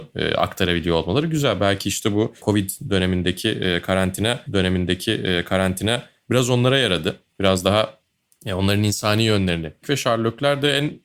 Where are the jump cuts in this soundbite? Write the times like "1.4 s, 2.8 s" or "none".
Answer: 4.5 s, 9.8 s